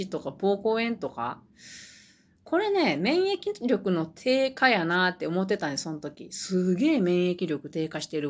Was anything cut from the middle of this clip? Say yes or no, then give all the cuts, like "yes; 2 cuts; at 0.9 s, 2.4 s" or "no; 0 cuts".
no; 0 cuts